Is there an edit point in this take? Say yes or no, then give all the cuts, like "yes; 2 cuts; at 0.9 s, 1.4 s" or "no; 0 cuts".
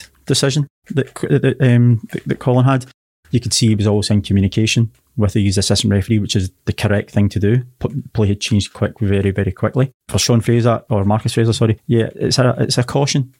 no; 0 cuts